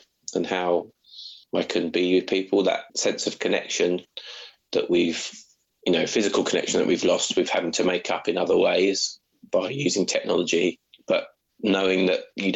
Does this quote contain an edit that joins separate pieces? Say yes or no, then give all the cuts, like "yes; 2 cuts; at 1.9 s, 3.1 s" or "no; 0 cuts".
yes; 2 cuts; at 1.4 s, 2.9 s